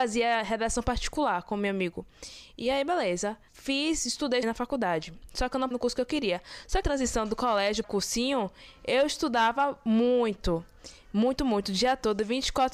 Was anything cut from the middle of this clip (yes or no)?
yes